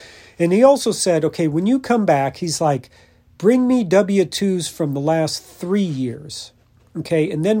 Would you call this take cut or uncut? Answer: uncut